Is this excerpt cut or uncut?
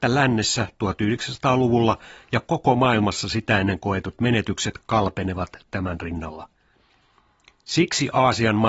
uncut